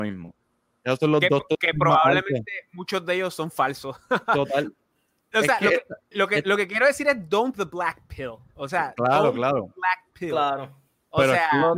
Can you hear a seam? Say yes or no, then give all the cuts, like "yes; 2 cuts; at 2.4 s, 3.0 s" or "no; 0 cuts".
yes; 2 cuts; at 6.1 s, 7.5 s